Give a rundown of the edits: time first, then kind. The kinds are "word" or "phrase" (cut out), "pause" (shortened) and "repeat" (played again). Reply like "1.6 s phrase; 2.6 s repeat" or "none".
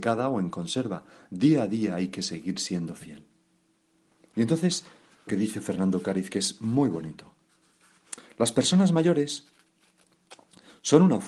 5.3 s phrase